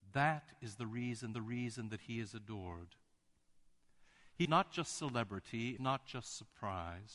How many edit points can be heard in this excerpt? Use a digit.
3